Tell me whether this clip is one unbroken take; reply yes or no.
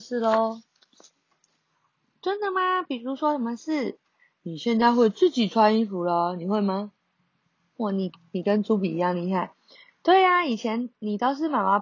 yes